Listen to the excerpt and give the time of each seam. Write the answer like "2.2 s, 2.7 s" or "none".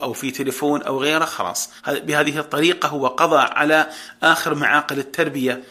1.8 s